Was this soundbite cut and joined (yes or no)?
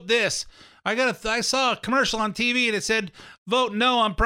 no